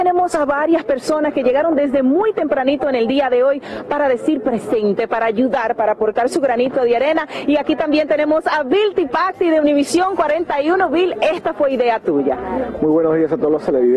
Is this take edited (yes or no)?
no